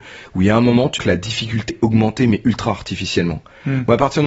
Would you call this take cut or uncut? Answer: cut